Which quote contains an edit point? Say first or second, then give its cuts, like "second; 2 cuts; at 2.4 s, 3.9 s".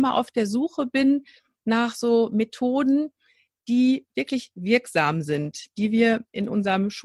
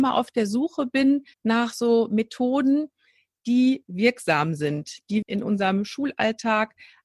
second; 3 cuts; at 1.3 s, 3.9 s, 5.2 s